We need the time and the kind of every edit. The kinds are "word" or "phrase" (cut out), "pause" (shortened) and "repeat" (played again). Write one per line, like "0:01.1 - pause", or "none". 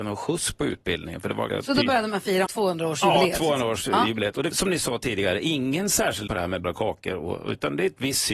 0:01.5 - word
0:02.5 - word
0:04.5 - word
0:06.3 - word
0:06.6 - word